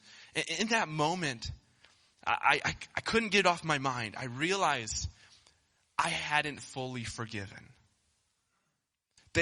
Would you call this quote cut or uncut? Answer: uncut